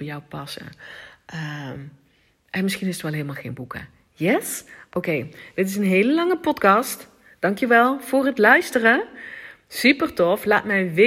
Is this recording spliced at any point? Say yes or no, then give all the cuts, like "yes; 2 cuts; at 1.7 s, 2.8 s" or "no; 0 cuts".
no; 0 cuts